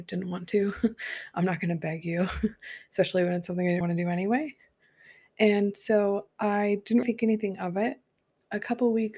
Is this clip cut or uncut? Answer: cut